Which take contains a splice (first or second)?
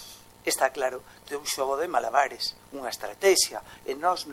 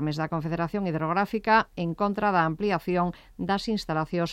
first